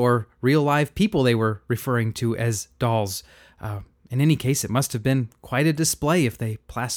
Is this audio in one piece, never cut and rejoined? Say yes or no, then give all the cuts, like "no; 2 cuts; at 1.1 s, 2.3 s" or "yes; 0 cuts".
yes; 0 cuts